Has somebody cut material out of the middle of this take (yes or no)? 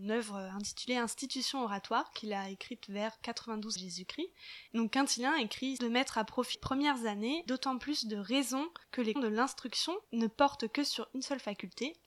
yes